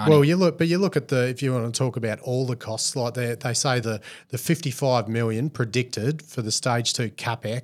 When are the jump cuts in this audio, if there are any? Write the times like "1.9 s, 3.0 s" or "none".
none